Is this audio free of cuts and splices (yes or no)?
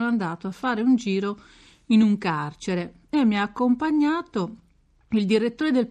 yes